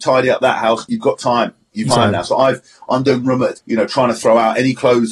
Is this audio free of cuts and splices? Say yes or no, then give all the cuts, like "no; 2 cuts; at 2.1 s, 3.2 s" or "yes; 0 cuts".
no; 3 cuts; at 1.9 s, 3.2 s, 3.5 s